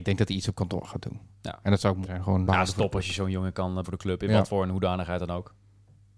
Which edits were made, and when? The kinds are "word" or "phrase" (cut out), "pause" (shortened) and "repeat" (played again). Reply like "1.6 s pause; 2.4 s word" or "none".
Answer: 2.0 s word; 2.5 s word; 3.8 s word